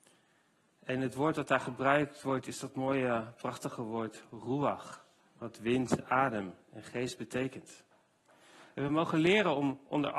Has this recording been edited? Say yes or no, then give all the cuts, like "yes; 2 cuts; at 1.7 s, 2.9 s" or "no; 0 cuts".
no; 0 cuts